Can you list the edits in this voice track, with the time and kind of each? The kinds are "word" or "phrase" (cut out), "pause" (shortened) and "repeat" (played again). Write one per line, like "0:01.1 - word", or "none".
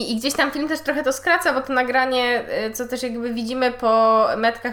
none